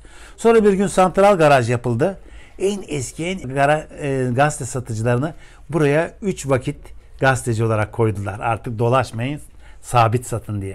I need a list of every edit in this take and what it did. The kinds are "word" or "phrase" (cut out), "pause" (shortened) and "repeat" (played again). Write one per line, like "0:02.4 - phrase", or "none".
0:03.4 - word